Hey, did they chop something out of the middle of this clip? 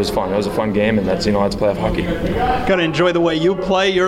no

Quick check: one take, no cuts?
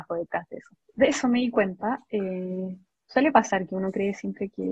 yes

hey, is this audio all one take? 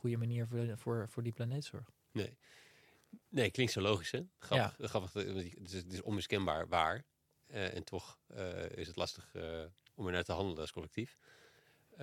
no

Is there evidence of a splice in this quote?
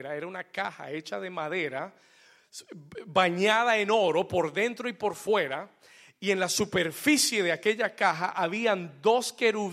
no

